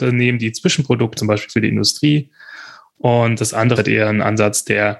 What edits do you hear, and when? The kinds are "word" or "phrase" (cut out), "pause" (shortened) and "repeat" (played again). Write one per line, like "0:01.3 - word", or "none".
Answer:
0:01.2 - word
0:03.8 - word